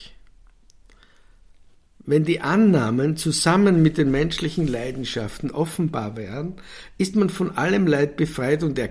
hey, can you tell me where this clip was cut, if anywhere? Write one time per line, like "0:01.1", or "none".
none